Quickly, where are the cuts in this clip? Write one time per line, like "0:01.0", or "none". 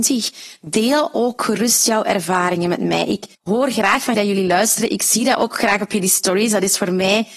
0:03.3
0:04.1